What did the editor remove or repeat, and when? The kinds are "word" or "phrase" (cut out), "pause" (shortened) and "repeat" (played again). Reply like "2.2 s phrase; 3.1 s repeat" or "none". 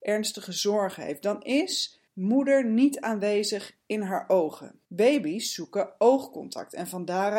2.1 s pause; 4.8 s pause